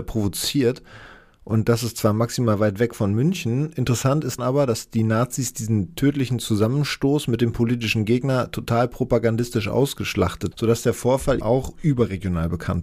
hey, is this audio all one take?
no; 3 cuts; at 4.4 s, 10.5 s, 11.4 s

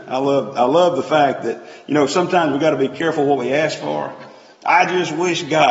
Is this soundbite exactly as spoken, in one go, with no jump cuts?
yes; 0 cuts

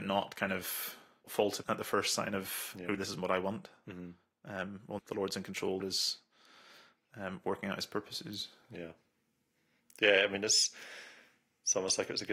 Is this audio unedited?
no; 5 cuts; at 1.2 s, 1.6 s, 3.0 s, 5.0 s, 5.8 s

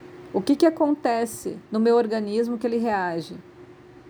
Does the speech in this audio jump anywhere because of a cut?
yes; 1 cut; at 1.7 s

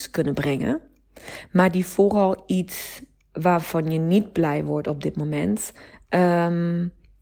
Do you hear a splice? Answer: no; 0 cuts

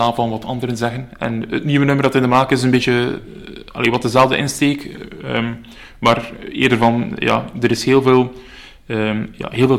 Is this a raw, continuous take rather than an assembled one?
yes; 0 cuts

